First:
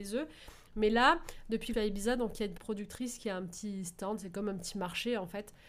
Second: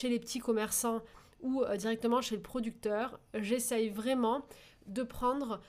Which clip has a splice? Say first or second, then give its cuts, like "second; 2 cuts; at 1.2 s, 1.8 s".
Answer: first; 2 cuts; at 1.7 s, 2.6 s